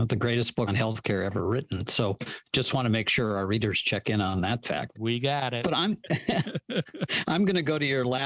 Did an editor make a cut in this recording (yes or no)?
no